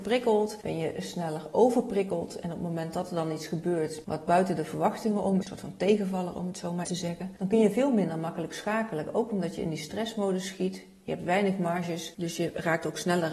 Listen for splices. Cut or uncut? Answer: cut